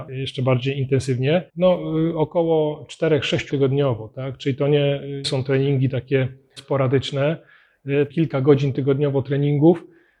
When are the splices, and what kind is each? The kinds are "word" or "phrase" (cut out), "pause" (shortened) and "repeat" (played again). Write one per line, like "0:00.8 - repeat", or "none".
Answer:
0:01.5 - pause
0:03.5 - word
0:05.2 - word
0:06.6 - word
0:08.1 - phrase